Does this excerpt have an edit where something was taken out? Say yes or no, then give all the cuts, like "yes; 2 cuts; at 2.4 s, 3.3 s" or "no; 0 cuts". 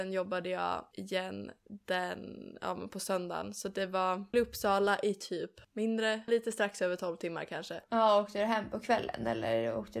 yes; 2 cuts; at 4.3 s, 6.3 s